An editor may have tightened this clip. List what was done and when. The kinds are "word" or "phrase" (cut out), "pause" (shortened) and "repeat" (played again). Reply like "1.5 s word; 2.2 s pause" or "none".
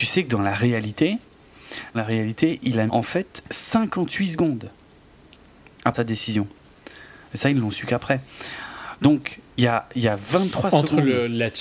1.9 s word; 2.9 s word; 5.9 s word; 9.5 s pause